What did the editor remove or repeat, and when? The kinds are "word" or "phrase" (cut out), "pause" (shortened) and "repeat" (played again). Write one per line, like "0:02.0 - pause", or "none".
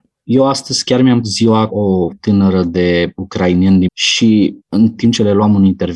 0:01.2 - word
0:01.7 - word
0:02.1 - word
0:03.9 - word
0:04.6 - pause